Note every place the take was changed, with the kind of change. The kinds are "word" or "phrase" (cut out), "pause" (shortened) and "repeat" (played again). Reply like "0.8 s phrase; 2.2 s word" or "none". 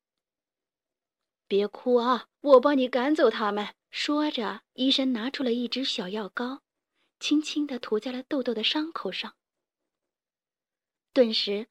2.3 s pause; 3.8 s pause; 4.7 s pause